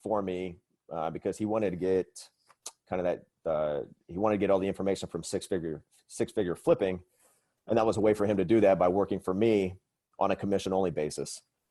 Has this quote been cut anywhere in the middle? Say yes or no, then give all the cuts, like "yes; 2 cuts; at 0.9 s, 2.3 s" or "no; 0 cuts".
no; 0 cuts